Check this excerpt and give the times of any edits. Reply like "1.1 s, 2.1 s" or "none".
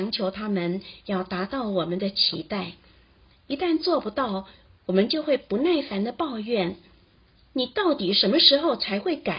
none